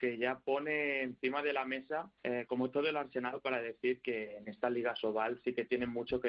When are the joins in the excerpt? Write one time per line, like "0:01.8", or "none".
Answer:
0:02.2